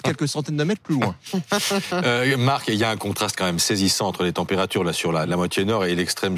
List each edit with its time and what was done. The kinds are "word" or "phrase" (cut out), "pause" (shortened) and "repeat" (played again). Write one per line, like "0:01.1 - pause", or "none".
0:05.2 - word